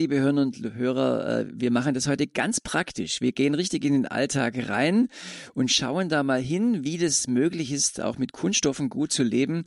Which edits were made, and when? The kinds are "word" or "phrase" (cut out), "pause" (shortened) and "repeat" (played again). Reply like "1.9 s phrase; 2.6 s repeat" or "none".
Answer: none